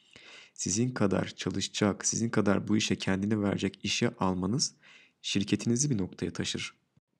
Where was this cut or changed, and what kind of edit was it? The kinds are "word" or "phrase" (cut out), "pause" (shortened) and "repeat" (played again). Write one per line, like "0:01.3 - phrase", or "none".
0:03.8 - word